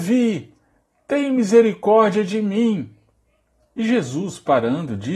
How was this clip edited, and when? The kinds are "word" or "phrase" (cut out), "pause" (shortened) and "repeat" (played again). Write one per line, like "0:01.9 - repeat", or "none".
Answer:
none